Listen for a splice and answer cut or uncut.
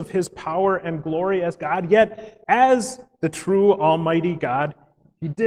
cut